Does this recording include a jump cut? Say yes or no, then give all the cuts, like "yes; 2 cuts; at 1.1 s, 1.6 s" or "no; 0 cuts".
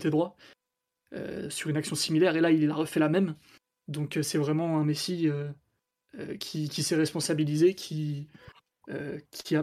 no; 0 cuts